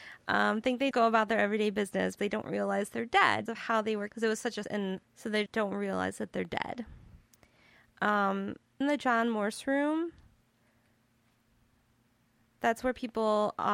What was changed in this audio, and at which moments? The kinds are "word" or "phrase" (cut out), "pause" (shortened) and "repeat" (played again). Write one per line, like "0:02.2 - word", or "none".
0:00.9 - word
0:02.2 - word
0:03.5 - word
0:04.1 - word
0:04.6 - word
0:05.0 - word
0:05.5 - word
0:08.8 - word